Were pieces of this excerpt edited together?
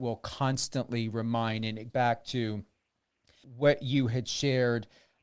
yes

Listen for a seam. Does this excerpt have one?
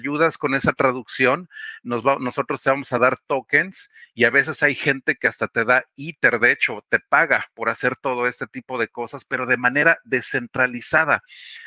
no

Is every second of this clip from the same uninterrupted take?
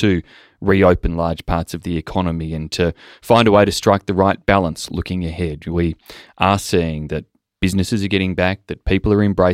yes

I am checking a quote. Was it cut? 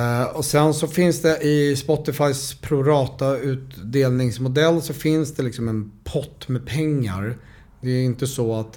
no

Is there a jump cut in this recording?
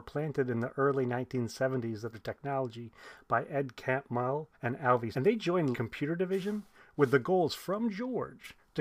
yes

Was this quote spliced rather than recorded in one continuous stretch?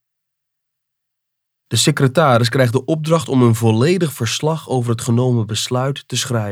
no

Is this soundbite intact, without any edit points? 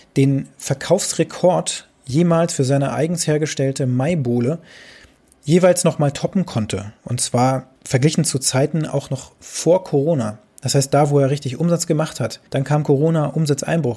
no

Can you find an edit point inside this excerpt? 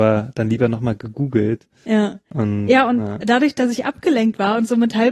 no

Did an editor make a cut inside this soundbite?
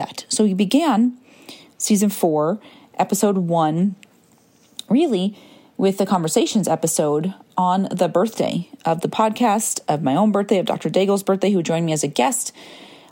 no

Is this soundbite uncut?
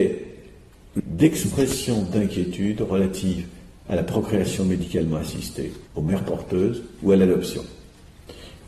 no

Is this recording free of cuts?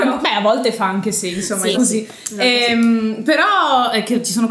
no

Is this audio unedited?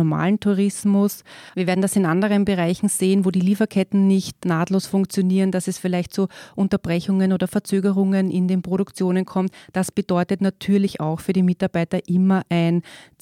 no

